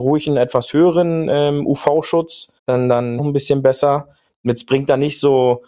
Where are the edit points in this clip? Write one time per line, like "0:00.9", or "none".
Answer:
0:02.6
0:03.2